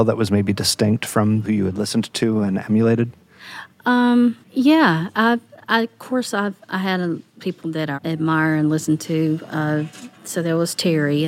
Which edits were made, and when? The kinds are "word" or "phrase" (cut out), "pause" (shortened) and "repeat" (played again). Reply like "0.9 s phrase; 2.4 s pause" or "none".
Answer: 1.4 s phrase; 4.4 s pause; 7.4 s word; 7.9 s word